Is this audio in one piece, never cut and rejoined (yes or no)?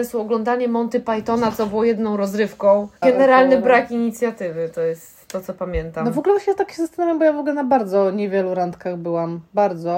no